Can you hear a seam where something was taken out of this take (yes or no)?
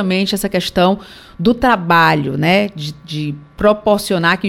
no